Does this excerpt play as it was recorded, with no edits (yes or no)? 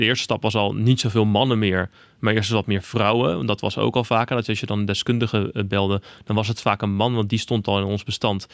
yes